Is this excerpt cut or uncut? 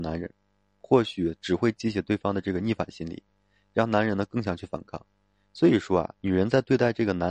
uncut